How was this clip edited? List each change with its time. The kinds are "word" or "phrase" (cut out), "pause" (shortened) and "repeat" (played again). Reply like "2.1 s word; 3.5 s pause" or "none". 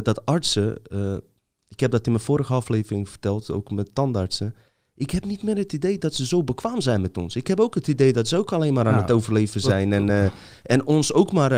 none